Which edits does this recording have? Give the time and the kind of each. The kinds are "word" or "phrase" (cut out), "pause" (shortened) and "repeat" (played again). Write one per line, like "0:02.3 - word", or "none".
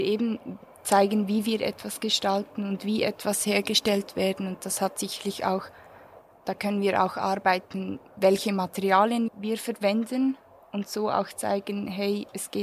0:09.3 - word